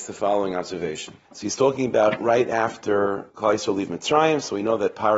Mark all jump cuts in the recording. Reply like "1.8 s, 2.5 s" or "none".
1.2 s, 3.3 s